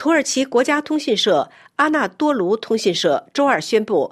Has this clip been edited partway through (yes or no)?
no